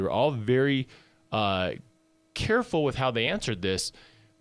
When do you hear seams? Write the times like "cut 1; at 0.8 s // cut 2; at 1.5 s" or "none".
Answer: none